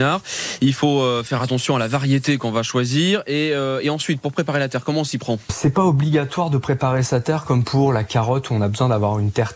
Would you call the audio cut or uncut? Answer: uncut